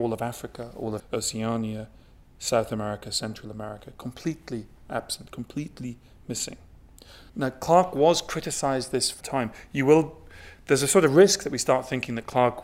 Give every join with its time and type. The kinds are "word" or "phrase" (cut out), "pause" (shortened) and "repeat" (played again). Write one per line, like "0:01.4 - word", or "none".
0:01.0 - word
0:07.3 - pause
0:09.2 - phrase